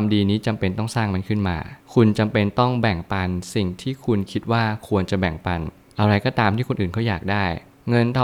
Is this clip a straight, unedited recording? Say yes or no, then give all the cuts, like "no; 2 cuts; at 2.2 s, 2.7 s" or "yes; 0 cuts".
yes; 0 cuts